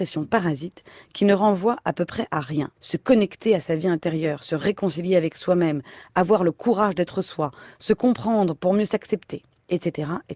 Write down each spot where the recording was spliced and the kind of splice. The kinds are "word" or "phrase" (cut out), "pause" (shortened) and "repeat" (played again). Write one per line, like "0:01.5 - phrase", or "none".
0:02.8 - pause